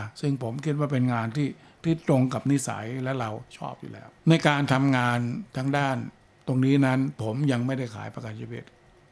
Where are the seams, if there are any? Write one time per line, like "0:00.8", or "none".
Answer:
0:04.2